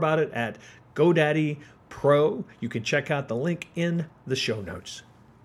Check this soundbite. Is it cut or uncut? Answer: uncut